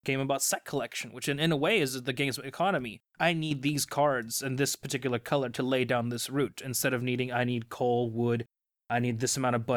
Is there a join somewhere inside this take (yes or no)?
yes